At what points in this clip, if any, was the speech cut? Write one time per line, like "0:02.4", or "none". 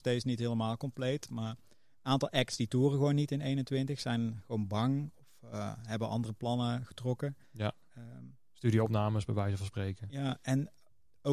none